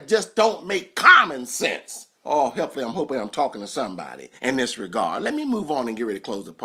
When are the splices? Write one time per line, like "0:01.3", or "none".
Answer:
0:02.1
0:04.4